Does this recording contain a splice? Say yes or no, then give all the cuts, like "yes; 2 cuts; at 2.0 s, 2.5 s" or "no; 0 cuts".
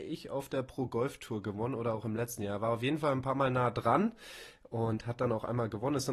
no; 0 cuts